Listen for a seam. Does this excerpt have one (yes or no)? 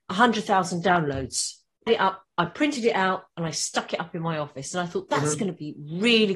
yes